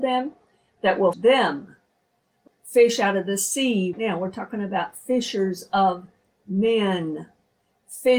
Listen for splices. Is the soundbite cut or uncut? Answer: cut